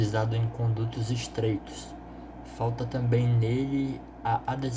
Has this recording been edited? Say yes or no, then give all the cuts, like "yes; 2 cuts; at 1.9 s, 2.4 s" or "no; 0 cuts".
no; 0 cuts